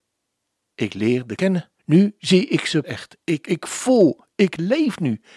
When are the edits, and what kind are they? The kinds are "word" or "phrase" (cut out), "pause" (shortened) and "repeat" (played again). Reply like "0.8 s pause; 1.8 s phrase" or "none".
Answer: 1.4 s word; 1.8 s pause; 2.8 s word; 3.4 s word